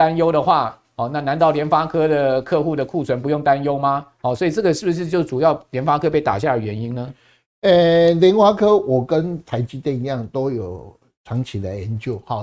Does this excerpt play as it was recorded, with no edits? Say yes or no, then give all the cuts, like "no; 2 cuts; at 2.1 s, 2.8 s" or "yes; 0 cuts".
yes; 0 cuts